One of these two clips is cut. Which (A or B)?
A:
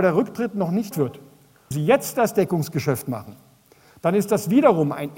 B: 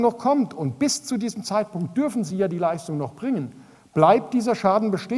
A